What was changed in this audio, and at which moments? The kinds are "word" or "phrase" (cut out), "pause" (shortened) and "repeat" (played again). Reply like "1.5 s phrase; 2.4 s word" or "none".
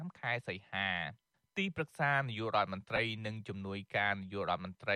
none